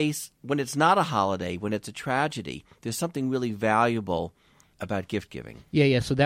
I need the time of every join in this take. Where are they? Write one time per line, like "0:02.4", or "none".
none